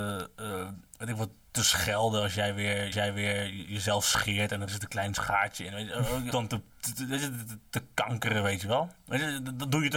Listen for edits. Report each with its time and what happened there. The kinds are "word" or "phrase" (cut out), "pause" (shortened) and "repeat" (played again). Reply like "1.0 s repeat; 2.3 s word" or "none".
2.9 s repeat; 6.3 s phrase; 6.7 s pause